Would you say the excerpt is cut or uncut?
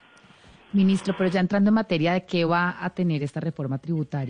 uncut